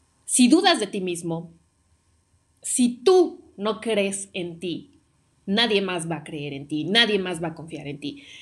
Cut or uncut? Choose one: uncut